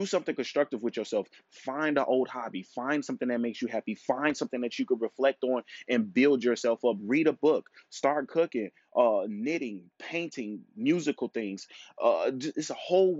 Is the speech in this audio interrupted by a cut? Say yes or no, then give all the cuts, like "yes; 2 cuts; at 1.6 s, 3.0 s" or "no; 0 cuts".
no; 0 cuts